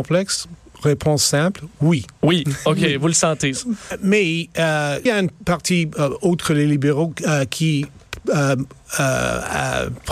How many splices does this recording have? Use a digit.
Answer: 1